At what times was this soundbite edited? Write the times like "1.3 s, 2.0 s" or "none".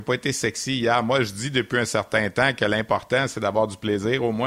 none